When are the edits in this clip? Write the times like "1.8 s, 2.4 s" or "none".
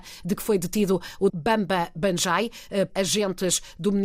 1.3 s, 2.9 s